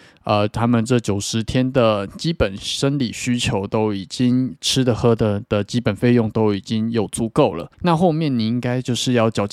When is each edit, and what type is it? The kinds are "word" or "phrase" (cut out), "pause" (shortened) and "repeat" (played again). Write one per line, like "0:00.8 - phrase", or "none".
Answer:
0:07.7 - pause